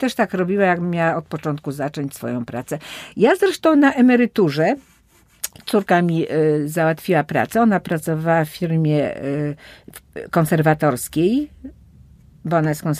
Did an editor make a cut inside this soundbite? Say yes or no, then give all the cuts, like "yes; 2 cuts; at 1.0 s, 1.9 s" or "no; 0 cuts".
no; 0 cuts